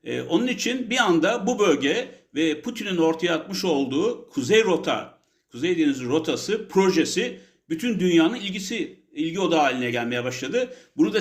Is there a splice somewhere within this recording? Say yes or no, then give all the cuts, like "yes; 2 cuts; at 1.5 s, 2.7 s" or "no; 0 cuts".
no; 0 cuts